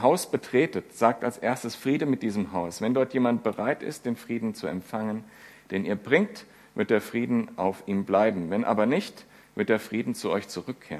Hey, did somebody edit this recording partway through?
no; 0 cuts

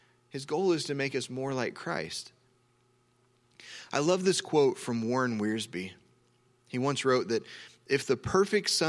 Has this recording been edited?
no; 0 cuts

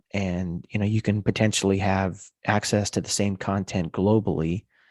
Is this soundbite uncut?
yes; 0 cuts

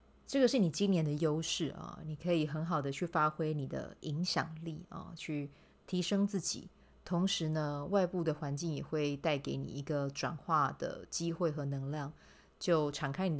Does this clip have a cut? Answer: no; 0 cuts

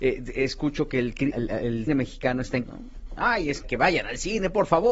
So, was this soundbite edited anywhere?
yes; 4 cuts; at 1.3 s, 1.9 s, 2.6 s, 3.6 s

